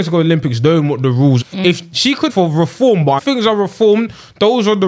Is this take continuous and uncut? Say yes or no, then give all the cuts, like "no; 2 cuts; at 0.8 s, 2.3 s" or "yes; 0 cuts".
no; 3 cuts; at 1.4 s, 2.3 s, 3.2 s